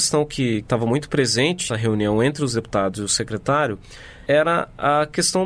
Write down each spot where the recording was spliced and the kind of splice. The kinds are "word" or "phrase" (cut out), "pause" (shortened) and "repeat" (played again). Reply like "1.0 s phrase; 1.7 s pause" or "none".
1.7 s word

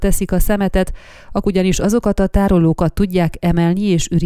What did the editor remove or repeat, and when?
1.4 s word

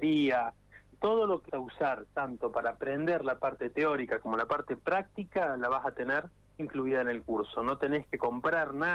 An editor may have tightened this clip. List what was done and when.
0.9 s word; 1.5 s word; 6.6 s word

